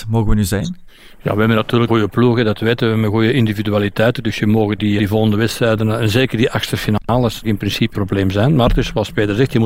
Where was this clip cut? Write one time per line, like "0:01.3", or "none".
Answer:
0:01.9
0:05.0
0:07.4
0:07.9